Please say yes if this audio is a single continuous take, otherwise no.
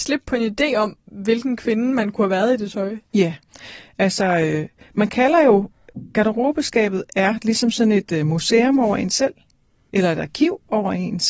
yes